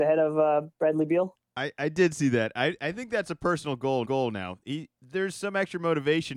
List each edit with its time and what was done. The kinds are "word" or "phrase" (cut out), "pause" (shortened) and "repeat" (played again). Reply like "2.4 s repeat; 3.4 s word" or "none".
4.0 s repeat